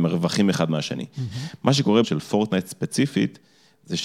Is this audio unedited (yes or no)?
no